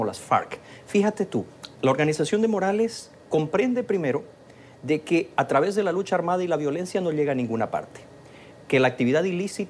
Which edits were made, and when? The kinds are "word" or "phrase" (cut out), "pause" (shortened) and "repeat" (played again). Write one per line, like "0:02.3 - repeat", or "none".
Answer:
0:01.7 - pause